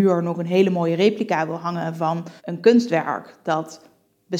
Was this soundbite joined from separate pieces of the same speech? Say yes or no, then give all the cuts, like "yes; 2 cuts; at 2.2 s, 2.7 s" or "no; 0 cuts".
yes; 1 cut; at 2.4 s